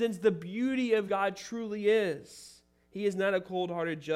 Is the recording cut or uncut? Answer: cut